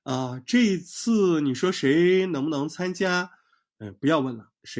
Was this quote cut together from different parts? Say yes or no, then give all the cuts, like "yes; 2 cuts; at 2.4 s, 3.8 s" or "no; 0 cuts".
no; 0 cuts